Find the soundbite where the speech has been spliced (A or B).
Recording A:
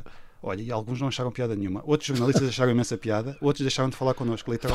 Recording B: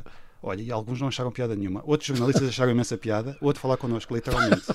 B